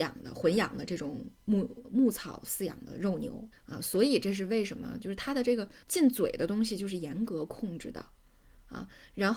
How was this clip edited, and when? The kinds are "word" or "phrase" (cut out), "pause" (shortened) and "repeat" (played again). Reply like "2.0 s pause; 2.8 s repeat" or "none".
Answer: 3.5 s pause; 5.8 s pause